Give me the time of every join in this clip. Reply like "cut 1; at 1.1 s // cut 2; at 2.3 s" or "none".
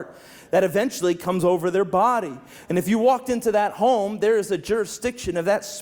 none